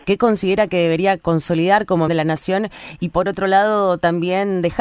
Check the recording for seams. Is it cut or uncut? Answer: cut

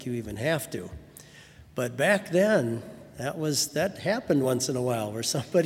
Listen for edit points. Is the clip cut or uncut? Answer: uncut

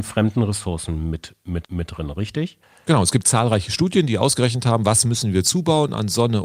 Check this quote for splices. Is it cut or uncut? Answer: cut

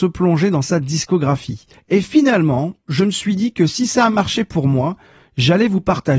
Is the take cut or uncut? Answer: cut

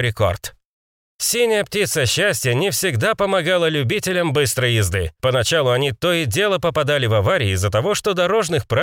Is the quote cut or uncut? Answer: uncut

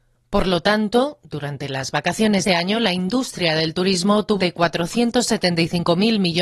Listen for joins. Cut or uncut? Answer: cut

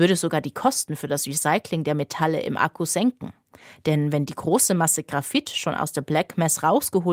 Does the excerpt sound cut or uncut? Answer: uncut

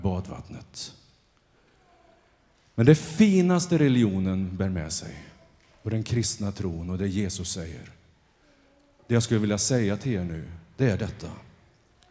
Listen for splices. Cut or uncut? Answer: uncut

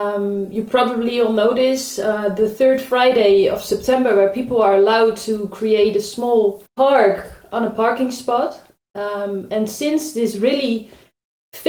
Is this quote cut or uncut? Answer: cut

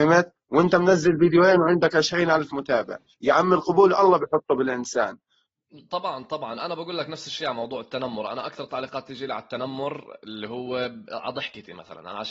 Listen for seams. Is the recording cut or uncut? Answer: uncut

